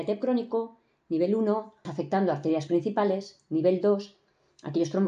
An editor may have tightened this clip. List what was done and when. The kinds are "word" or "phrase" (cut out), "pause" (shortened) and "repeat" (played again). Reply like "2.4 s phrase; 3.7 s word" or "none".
1.8 s word; 2.7 s word